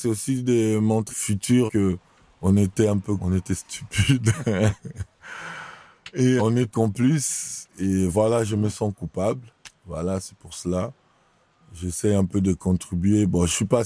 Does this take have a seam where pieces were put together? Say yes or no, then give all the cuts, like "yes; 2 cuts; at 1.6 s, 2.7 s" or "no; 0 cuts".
yes; 5 cuts; at 1.1 s, 1.7 s, 3.2 s, 6.4 s, 6.7 s